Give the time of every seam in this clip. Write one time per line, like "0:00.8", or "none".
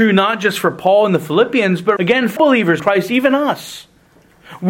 0:02.0
0:02.4
0:02.8

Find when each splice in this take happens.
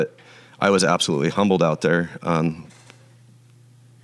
none

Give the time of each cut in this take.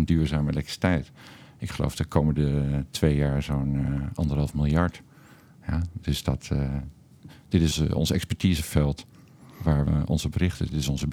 0:07.7
0:09.9

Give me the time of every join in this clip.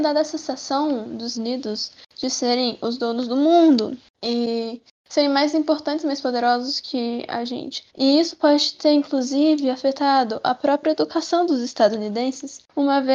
0:01.3
0:07.9

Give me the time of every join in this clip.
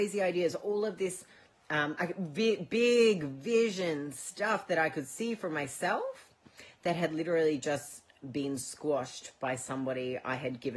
none

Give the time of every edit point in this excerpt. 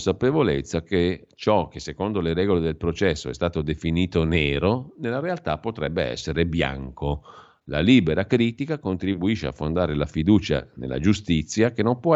none

